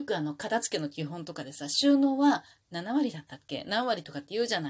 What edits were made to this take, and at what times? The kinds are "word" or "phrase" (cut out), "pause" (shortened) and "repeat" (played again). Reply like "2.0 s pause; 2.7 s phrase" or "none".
none